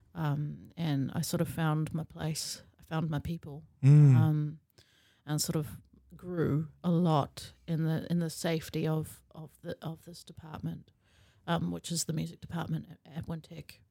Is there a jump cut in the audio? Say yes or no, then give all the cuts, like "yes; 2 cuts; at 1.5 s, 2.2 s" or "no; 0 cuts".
no; 0 cuts